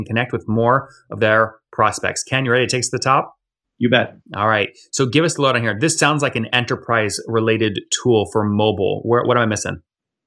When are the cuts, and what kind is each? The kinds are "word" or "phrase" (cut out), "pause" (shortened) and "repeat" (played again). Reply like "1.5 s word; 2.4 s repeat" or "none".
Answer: 3.6 s pause; 4.2 s pause